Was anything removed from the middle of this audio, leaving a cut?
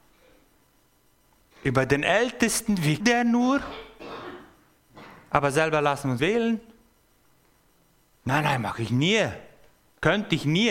yes; 2 cuts; at 3.0 s, 6.2 s

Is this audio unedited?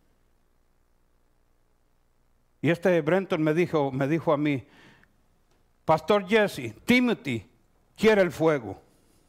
yes; 0 cuts

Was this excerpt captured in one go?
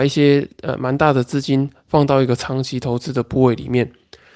yes; 0 cuts

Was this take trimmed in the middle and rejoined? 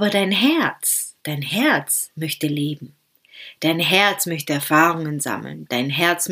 yes; 1 cut; at 1.2 s

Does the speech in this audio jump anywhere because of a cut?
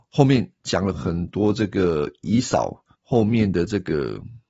yes; 1 cut; at 2.9 s

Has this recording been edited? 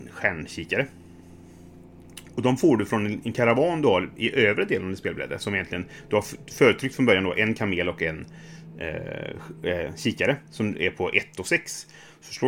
no; 0 cuts

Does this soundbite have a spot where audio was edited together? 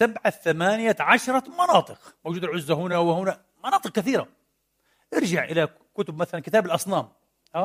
yes; 2 cuts; at 2.2 s, 2.9 s

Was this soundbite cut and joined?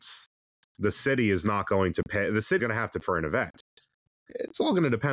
yes; 2 cuts; at 2.6 s, 3.0 s

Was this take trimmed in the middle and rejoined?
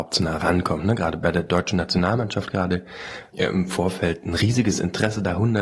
no; 0 cuts

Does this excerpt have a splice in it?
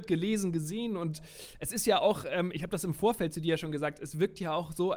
no; 0 cuts

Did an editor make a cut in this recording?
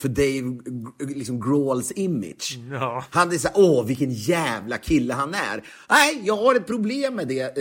no; 0 cuts

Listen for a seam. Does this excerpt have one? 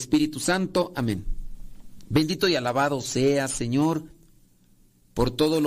no; 0 cuts

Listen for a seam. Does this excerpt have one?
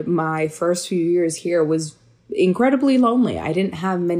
no; 0 cuts

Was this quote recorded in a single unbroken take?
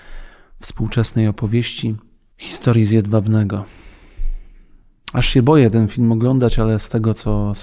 yes; 0 cuts

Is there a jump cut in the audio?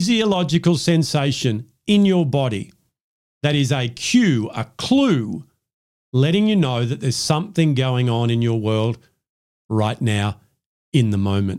no; 0 cuts

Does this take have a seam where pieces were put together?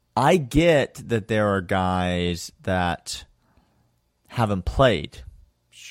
no; 0 cuts

